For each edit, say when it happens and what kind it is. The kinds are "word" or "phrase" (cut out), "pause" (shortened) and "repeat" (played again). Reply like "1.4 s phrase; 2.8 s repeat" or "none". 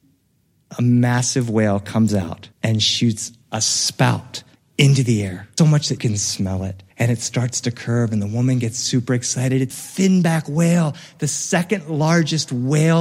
2.5 s pause; 3.4 s pause; 4.6 s pause; 5.6 s word; 6.0 s word; 6.9 s pause; 9.7 s word